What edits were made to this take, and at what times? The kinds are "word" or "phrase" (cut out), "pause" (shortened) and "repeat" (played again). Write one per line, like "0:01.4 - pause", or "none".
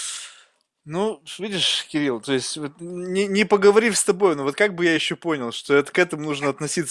none